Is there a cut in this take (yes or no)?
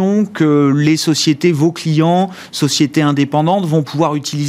no